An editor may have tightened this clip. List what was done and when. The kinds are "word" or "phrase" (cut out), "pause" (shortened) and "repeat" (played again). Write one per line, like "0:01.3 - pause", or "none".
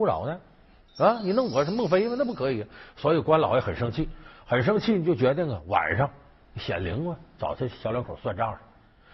none